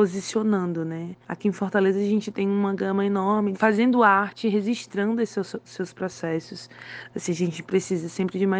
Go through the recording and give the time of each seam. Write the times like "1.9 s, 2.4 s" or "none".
3.5 s